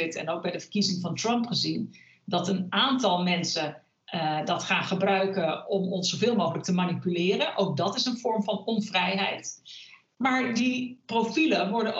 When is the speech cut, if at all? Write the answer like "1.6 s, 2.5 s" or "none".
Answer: none